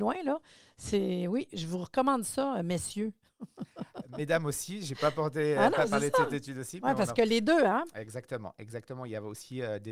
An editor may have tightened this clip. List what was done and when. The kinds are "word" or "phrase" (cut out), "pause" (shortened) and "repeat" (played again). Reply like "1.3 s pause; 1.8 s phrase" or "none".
none